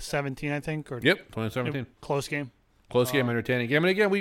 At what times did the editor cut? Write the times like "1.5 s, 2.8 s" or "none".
1.9 s, 2.7 s